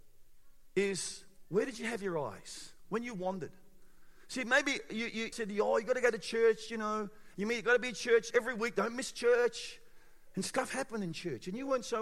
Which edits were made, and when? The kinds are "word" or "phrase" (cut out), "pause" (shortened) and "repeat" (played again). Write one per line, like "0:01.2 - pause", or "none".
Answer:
0:05.3 - word
0:08.3 - word